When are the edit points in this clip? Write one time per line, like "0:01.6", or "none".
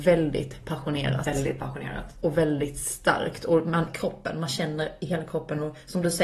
0:03.9